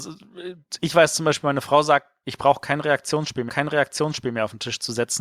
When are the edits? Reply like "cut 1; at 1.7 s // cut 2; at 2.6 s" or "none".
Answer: cut 1; at 3.5 s